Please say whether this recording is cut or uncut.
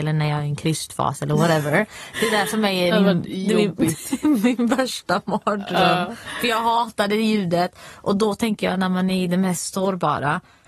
uncut